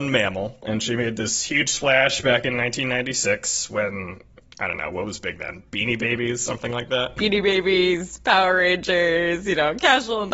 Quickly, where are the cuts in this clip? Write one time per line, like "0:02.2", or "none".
none